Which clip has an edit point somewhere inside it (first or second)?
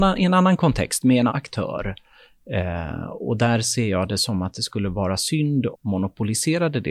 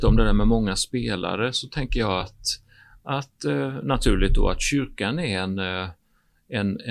first